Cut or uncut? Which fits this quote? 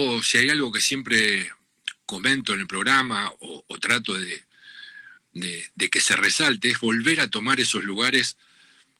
uncut